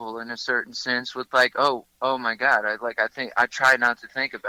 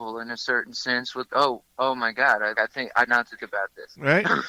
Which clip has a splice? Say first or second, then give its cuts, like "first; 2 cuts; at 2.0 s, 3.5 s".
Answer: second; 4 cuts; at 1.3 s, 2.5 s, 3.1 s, 3.4 s